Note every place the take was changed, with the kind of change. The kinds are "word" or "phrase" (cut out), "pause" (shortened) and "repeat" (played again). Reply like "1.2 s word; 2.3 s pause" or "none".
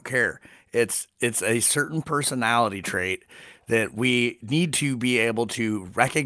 1.1 s word